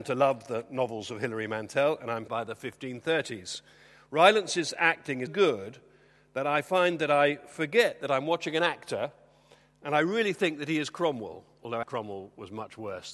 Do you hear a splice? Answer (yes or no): yes